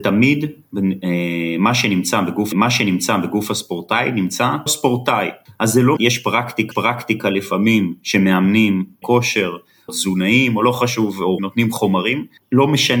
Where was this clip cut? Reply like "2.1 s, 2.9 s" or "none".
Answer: 2.5 s, 4.7 s, 6.0 s, 6.7 s, 9.0 s, 9.9 s, 11.4 s